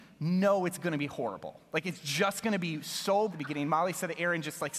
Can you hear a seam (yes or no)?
yes